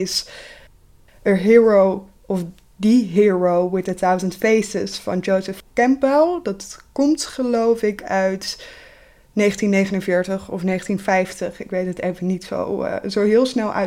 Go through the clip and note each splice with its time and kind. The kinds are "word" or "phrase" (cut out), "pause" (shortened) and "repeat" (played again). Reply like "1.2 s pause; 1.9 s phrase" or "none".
none